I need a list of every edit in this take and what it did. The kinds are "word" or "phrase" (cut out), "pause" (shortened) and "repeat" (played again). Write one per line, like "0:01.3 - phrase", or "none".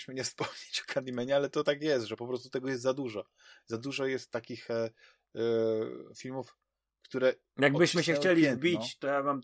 none